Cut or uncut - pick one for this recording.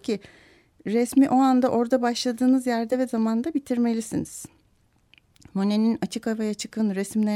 uncut